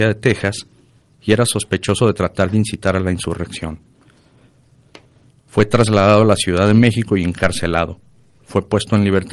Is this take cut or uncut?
uncut